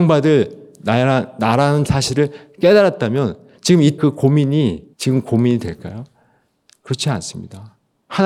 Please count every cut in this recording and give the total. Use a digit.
3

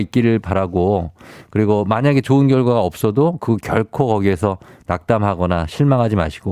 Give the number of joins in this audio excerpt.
0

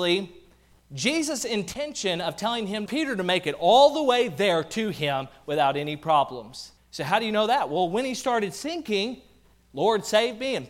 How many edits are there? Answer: 2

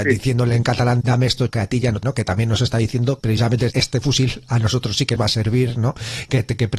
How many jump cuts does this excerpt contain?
6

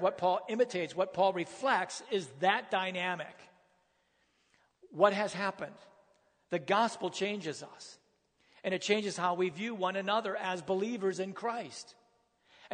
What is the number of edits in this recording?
0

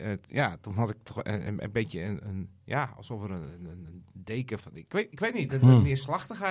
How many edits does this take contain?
1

